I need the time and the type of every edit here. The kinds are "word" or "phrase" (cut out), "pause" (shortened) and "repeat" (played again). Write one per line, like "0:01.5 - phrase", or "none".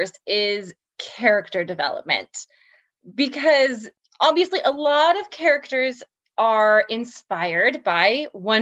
none